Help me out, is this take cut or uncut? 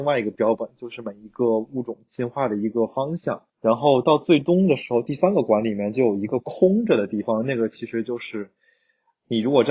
cut